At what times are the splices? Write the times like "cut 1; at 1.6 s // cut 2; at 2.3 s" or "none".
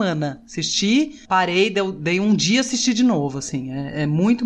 cut 1; at 1.2 s